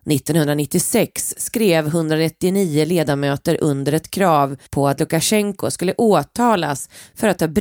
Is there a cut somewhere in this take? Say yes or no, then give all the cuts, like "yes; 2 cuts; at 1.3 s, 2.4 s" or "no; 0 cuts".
yes; 1 cut; at 4.7 s